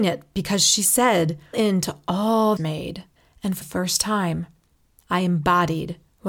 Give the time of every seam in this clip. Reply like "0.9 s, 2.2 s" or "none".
1.5 s, 2.6 s, 3.2 s, 3.6 s